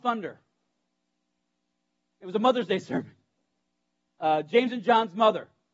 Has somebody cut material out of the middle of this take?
yes; 1 cut; at 4.1 s

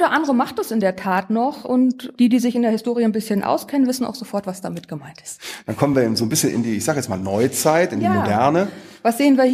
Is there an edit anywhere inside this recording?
no; 0 cuts

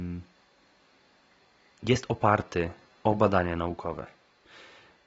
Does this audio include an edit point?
no; 0 cuts

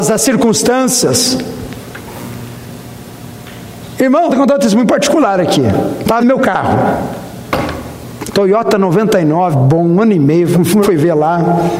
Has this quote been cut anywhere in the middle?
yes; 4 cuts; at 4.3 s, 6.2 s, 9.5 s, 10.8 s

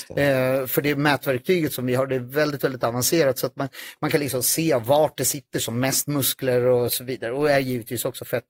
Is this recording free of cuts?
yes; 0 cuts

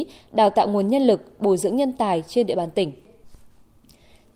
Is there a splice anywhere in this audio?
no; 0 cuts

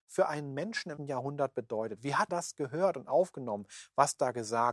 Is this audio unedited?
no; 2 cuts; at 1.0 s, 2.3 s

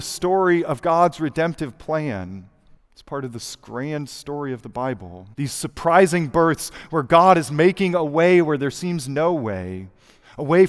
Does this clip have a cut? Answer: yes; 2 cuts; at 2.8 s, 5.3 s

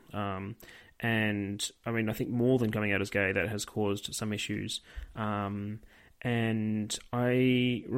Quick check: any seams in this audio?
no; 0 cuts

